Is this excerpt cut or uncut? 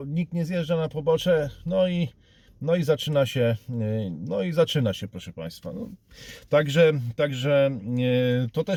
uncut